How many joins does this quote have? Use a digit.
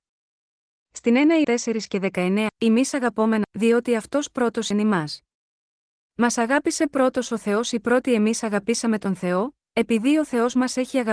4